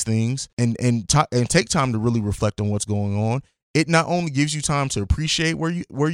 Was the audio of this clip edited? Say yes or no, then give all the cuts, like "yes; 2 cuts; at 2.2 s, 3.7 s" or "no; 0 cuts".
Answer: no; 0 cuts